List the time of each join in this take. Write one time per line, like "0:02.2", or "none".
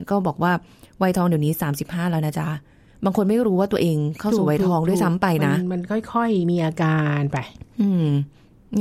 none